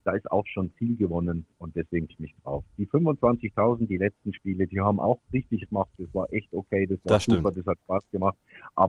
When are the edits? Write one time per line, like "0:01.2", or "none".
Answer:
0:01.5
0:02.1
0:03.9
0:05.7